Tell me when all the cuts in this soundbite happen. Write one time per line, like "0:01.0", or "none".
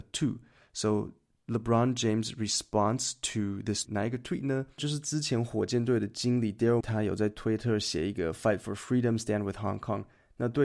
0:03.8
0:06.8

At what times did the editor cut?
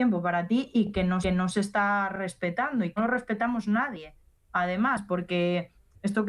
0:01.2
0:03.0

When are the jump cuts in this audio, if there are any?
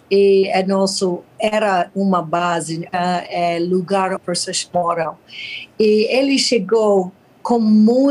0:01.3
0:02.9
0:04.2

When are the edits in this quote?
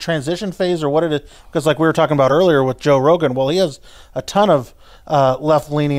none

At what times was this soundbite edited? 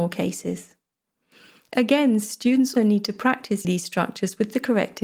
0:02.8
0:03.6

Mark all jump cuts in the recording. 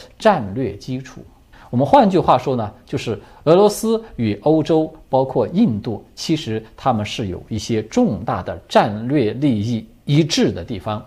0:01.5

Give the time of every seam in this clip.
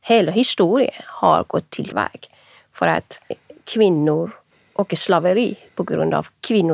0:01.9
0:03.3

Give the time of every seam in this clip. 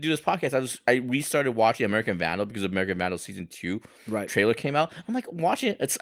none

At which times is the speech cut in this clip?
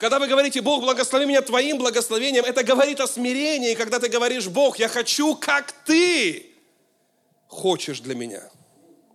none

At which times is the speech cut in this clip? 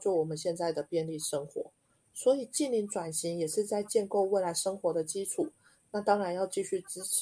none

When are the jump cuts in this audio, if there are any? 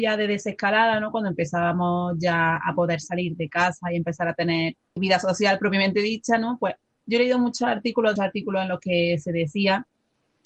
0:05.0
0:08.2

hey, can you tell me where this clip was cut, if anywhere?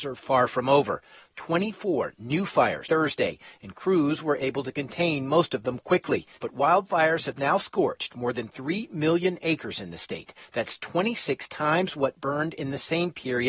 0:02.8
0:06.3

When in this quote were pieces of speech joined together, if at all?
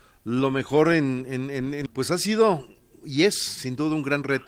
0:01.9

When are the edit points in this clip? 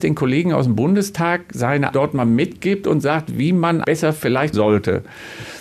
0:01.9
0:03.8
0:04.5

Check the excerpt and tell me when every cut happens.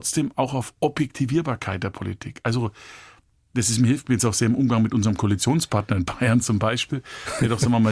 none

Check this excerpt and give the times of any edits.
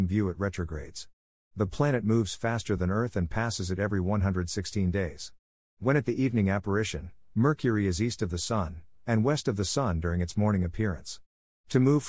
none

